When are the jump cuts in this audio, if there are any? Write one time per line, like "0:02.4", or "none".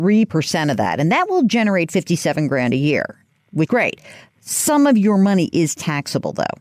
0:03.7